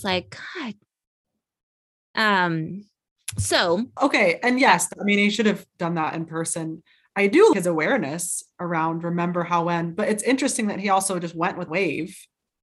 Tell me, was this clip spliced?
yes; 3 cuts; at 4.0 s, 7.5 s, 11.7 s

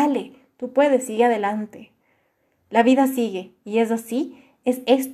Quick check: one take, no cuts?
yes; 0 cuts

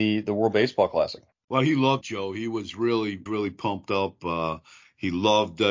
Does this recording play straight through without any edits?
no; 3 cuts; at 1.3 s, 2.0 s, 3.3 s

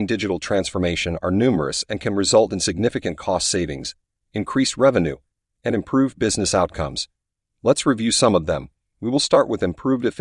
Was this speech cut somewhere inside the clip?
no; 0 cuts

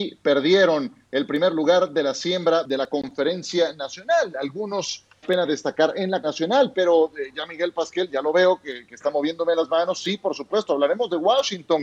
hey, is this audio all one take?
no; 2 cuts; at 5.2 s, 6.2 s

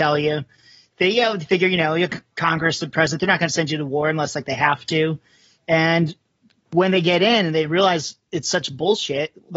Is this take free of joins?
yes; 0 cuts

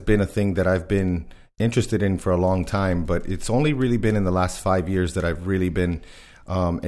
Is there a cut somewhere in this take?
no; 0 cuts

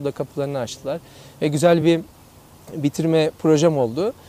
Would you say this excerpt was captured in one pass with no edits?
yes; 0 cuts

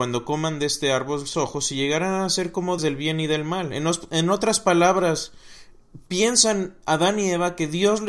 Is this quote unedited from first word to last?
no; 2 cuts; at 1.3 s, 2.8 s

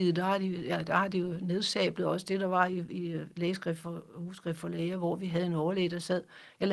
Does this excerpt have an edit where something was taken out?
no; 0 cuts

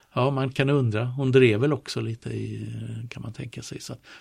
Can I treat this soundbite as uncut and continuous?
yes; 0 cuts

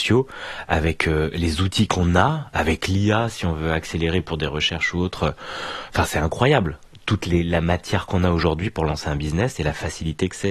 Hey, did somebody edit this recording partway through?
no; 0 cuts

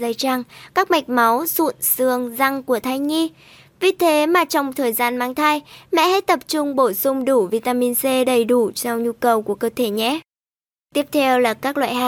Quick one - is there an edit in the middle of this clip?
no; 0 cuts

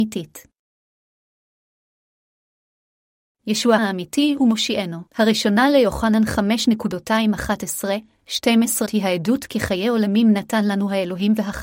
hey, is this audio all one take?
no; 3 cuts; at 3.8 s, 5.1 s, 8.9 s

